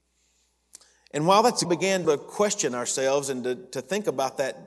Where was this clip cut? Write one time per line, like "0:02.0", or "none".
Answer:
0:01.6
0:02.0

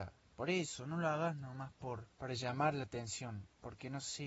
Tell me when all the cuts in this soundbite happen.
0:02.1

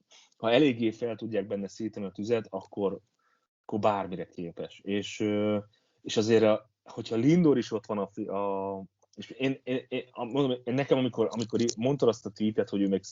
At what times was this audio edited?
none

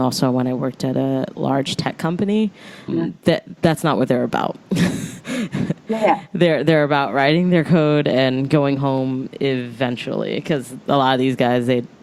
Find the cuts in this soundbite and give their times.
0:02.9
0:04.6

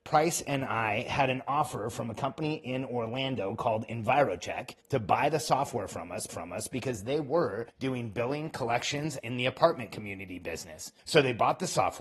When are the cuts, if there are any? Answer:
0:04.8
0:06.3
0:07.7
0:09.2
0:11.0

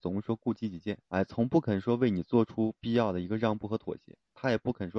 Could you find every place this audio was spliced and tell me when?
0:01.0

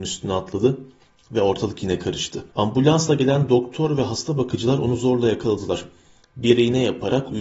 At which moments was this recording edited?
0:02.5

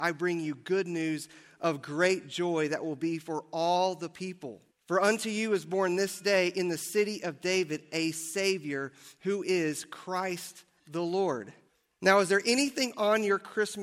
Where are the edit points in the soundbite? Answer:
0:04.7
0:11.7

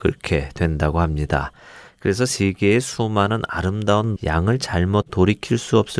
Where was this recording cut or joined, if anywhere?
0:04.2
0:05.1

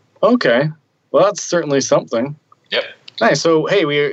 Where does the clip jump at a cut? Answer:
0:02.4

